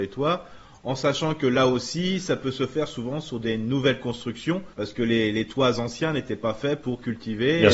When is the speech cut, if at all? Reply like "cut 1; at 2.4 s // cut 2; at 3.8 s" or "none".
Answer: cut 1; at 4.7 s